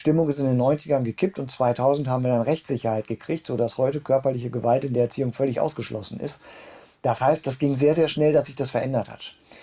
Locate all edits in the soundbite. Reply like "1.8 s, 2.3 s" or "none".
none